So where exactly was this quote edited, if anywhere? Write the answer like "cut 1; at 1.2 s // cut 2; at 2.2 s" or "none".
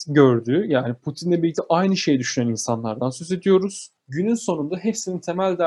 none